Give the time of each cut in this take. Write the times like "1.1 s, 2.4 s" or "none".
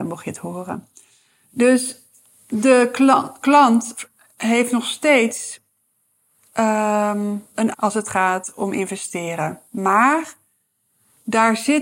7.7 s

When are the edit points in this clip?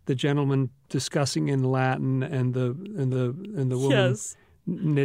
2.2 s, 3.1 s

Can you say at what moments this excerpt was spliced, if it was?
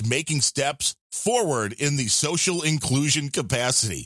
none

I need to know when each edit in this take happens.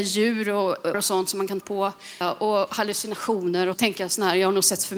0.9 s, 1.6 s, 2.2 s, 3.7 s

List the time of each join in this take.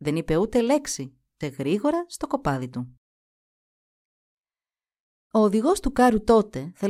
1.4 s

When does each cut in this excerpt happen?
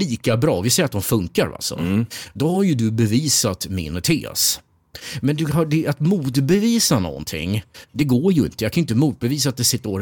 none

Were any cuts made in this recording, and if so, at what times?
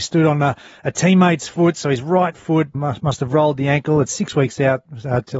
2.7 s

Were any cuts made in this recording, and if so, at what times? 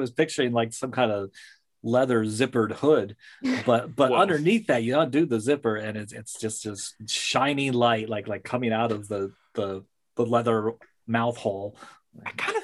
none

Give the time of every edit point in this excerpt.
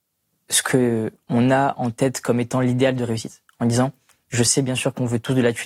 none

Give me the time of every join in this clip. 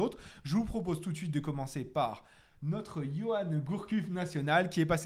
none

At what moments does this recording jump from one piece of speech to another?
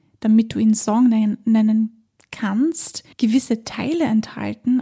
3.1 s

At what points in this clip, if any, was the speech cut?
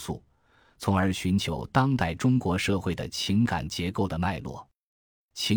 none

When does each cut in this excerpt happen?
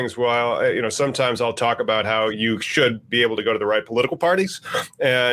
none

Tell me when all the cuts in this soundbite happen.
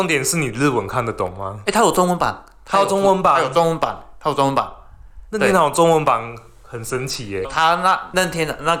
7.4 s

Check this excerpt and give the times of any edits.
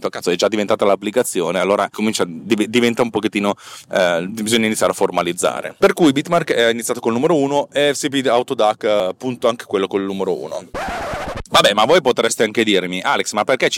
1.9 s

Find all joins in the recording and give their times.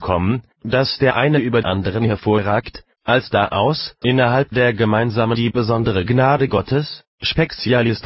1.6 s, 4.0 s, 5.3 s

